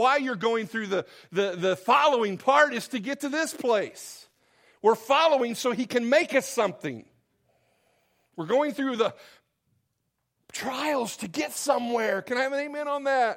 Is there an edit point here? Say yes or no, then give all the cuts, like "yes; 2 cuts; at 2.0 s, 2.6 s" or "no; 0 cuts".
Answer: no; 0 cuts